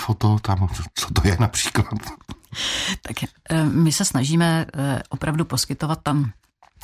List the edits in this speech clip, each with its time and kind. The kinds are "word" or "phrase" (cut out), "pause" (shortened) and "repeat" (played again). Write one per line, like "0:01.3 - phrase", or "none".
none